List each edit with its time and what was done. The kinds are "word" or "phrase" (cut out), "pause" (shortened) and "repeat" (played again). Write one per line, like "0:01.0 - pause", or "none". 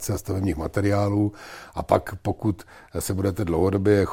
none